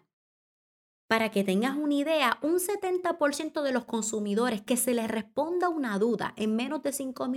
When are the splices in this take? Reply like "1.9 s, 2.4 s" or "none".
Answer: none